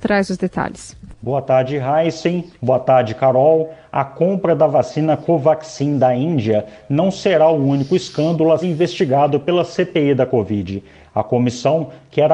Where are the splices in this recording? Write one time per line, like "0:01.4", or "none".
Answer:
0:08.6